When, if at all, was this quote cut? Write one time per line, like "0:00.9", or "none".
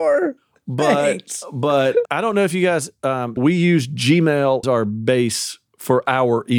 0:02.1
0:03.4
0:04.6